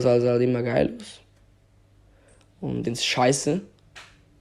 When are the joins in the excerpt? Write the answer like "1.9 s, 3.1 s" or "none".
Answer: 2.8 s